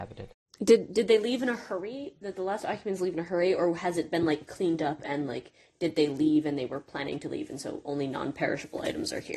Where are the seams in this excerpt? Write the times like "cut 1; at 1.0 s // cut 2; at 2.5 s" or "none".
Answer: none